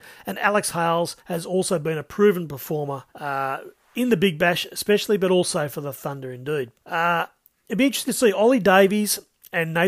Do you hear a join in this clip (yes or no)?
yes